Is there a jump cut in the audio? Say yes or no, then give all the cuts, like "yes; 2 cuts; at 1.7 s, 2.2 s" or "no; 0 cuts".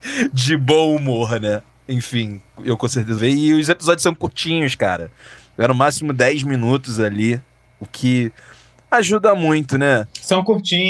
yes; 1 cut; at 3.2 s